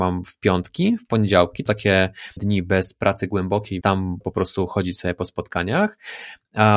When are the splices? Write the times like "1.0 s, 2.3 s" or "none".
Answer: 1.7 s, 2.4 s, 3.8 s, 4.2 s

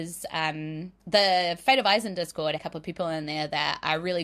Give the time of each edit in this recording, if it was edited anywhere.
1.0 s, 2.6 s

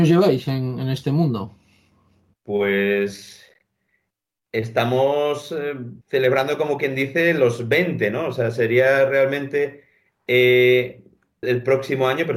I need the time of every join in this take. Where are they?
6.0 s, 11.4 s

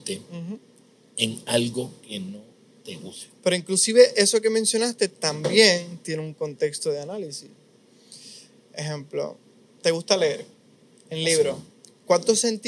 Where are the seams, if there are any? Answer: none

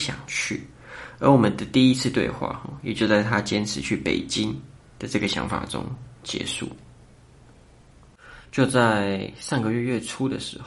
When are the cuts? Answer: 4.9 s

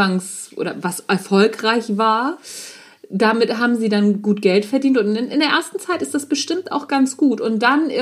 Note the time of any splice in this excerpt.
none

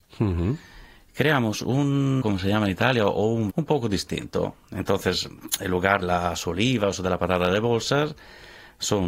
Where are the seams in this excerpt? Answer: 2.2 s, 3.5 s, 6.0 s

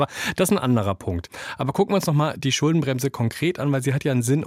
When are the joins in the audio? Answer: none

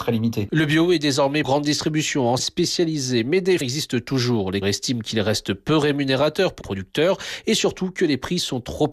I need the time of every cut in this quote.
1.4 s, 2.4 s, 3.6 s, 4.6 s, 6.6 s

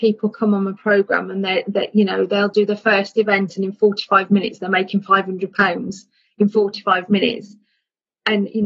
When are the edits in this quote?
none

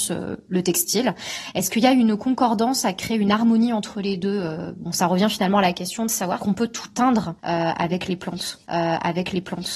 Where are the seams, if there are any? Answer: 6.4 s, 7.4 s, 8.7 s

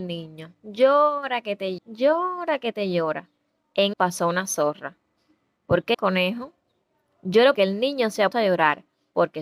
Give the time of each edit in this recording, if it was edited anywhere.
1.8 s, 3.9 s, 5.9 s, 7.5 s, 8.3 s

